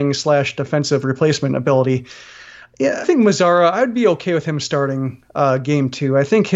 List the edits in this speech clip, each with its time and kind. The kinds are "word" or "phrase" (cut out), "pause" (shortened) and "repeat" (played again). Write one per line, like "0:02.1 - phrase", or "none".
0:03.0 - word